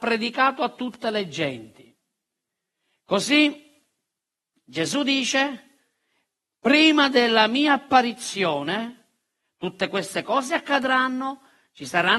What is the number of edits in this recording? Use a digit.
0